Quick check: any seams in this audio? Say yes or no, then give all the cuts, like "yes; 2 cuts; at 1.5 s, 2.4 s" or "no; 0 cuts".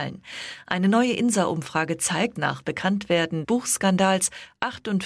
yes; 2 cuts; at 2.4 s, 3.4 s